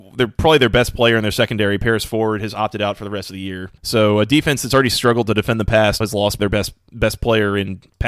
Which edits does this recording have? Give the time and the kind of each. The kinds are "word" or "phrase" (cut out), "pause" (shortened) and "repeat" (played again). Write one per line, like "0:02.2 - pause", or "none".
0:03.8 - pause
0:06.0 - word
0:06.4 - word

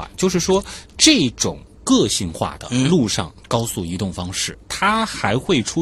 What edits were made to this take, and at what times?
0:04.5 - word

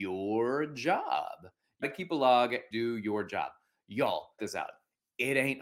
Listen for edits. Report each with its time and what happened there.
0:01.8 - word
0:02.7 - word
0:04.4 - word

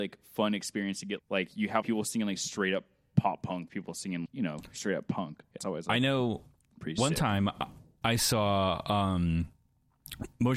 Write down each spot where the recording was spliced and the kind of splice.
0:01.2 - word
0:01.8 - word
0:03.7 - word
0:04.3 - word
0:05.6 - word
0:08.0 - word

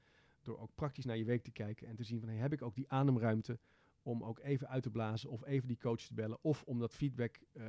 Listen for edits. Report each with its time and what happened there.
none

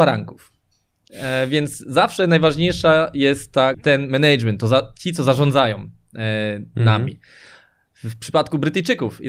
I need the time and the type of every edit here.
0:03.7 - phrase

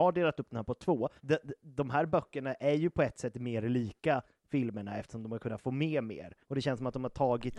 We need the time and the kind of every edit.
0:01.2 - pause
0:06.4 - pause

